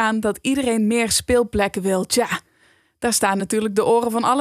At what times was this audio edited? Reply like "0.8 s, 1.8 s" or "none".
none